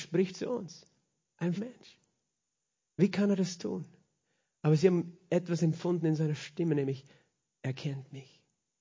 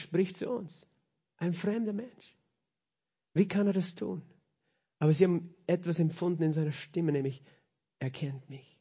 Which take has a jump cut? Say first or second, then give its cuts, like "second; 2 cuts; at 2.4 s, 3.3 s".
first; 1 cut; at 1.6 s